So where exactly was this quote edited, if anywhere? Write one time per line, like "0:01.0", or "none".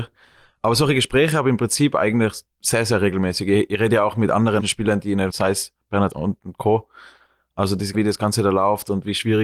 0:02.5
0:04.6
0:05.3
0:06.1
0:07.9